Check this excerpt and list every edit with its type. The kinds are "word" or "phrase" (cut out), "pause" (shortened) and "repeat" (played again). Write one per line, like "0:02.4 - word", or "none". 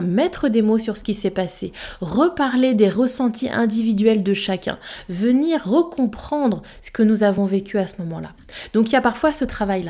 none